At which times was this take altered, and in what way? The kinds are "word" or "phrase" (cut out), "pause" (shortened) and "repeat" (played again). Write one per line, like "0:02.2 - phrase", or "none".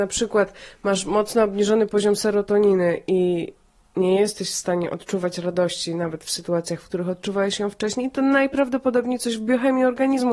none

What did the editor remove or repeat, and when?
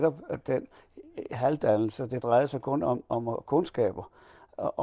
none

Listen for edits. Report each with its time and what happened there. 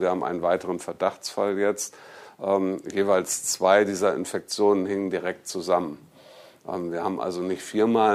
none

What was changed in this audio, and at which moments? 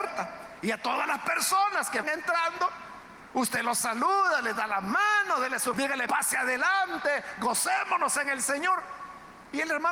0:02.0 - word
0:05.7 - word
0:06.1 - word

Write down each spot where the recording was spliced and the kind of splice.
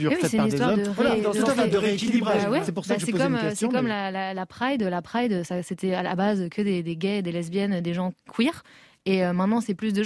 none

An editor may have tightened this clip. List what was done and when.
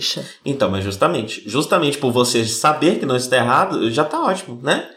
none

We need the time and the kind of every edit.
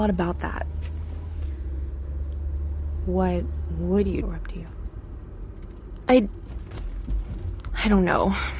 0:04.2 - phrase

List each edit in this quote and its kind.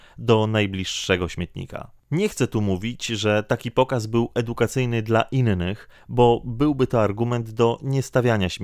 0:02.0 - pause

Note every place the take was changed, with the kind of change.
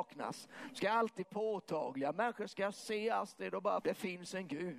0:01.2 - word
0:03.8 - word

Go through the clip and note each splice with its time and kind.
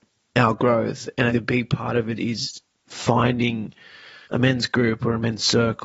0:01.3 - phrase
0:02.2 - word
0:04.2 - pause

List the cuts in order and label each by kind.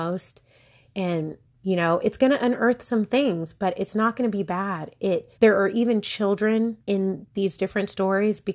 0:05.3 - pause
0:06.8 - pause

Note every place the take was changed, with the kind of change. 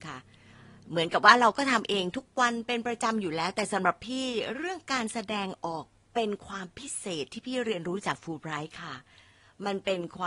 none

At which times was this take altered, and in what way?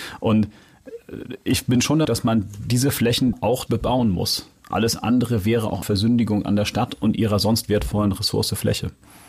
0:02.0 - word
0:03.3 - word
0:03.7 - word
0:05.8 - word

